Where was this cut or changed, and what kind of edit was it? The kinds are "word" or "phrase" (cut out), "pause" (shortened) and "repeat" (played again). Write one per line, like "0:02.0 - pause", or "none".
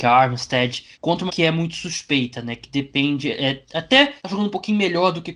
0:00.9 - pause
0:01.3 - phrase
0:04.2 - pause